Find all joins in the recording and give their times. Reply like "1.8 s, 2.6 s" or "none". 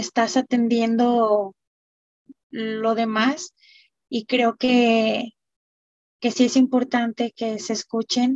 none